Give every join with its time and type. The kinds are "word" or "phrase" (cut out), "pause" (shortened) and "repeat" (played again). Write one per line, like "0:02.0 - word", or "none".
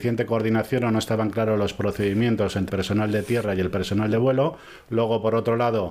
0:02.7 - word